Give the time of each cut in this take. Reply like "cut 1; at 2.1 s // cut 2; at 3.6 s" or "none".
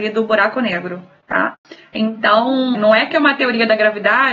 cut 1; at 2.7 s